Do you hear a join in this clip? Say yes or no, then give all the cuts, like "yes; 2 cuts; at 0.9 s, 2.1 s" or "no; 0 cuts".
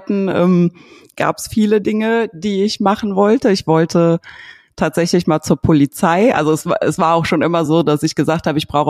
no; 0 cuts